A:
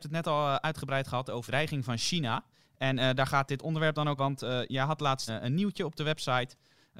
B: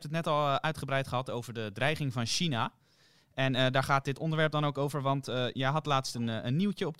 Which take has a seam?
A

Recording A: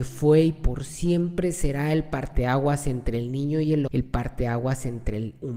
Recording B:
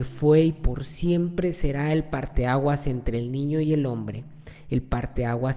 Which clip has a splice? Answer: A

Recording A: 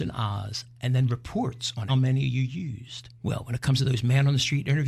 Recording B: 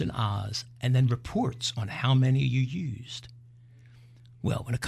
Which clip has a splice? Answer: A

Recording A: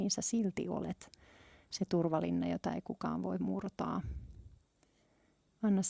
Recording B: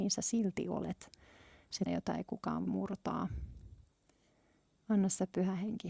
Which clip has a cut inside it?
B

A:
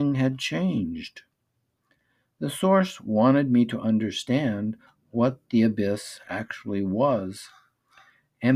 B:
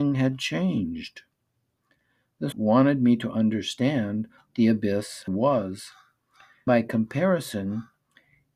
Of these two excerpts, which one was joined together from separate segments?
B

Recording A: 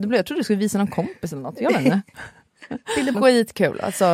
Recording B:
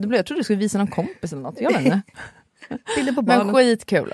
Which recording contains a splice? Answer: A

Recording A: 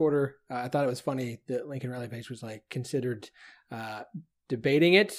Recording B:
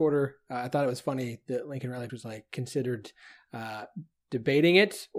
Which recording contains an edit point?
B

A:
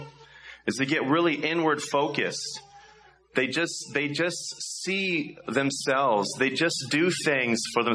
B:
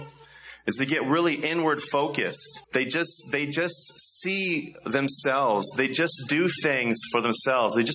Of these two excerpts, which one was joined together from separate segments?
B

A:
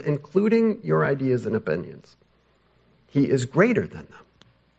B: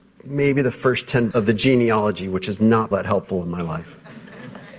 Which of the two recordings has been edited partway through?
B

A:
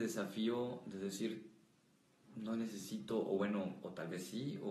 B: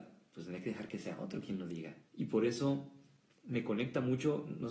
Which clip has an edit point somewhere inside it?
B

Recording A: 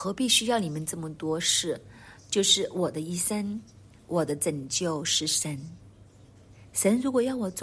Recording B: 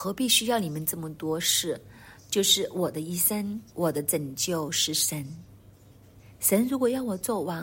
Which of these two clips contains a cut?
B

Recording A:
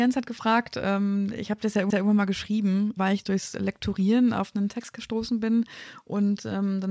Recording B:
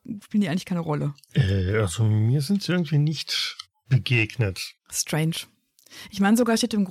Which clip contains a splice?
A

